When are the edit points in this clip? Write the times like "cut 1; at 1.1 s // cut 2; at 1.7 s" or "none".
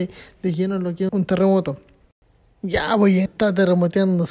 cut 1; at 1.1 s // cut 2; at 2.0 s // cut 3; at 3.3 s

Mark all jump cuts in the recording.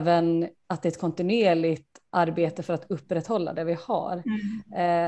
none

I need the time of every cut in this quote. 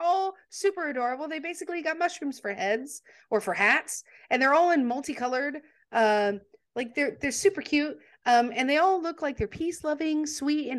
none

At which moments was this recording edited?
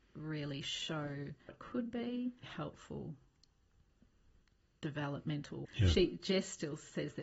cut 1; at 1.5 s // cut 2; at 2.4 s // cut 3; at 5.7 s

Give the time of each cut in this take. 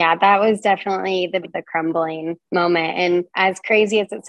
cut 1; at 1.4 s // cut 2; at 2.4 s // cut 3; at 3.3 s

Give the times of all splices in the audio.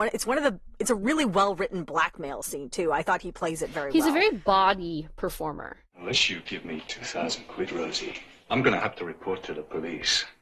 none

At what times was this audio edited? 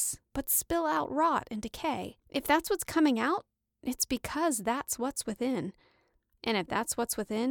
cut 1; at 2.2 s

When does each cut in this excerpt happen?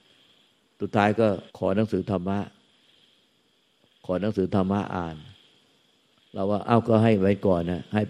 cut 1; at 1.5 s

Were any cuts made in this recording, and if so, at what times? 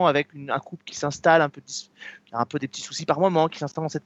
none

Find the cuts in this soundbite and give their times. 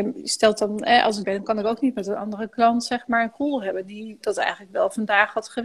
cut 1; at 1.2 s

